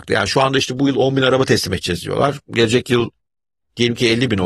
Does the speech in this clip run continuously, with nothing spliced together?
yes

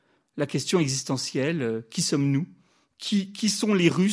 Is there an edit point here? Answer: no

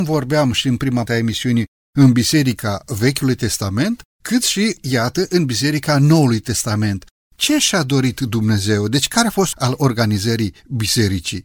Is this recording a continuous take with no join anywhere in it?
no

